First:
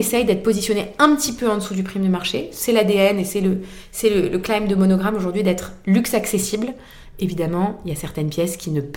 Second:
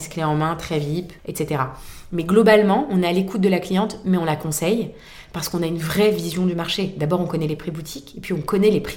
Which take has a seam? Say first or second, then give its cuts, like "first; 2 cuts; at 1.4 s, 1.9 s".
second; 1 cut; at 1.2 s